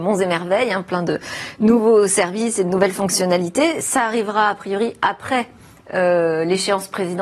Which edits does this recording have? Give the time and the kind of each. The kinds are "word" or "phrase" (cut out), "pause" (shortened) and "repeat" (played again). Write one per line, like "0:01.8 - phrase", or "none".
none

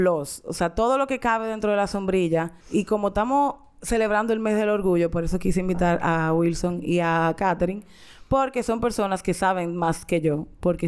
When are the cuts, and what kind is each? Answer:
0:02.6 - pause

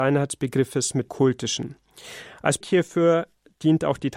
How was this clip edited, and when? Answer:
0:01.1 - word
0:02.6 - word

